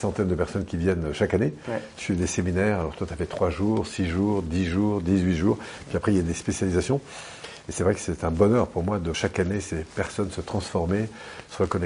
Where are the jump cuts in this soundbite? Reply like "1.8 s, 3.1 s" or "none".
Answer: 9.1 s